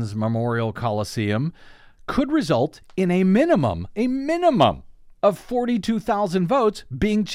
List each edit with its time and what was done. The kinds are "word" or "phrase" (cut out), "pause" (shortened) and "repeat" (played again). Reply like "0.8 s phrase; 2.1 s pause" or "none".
none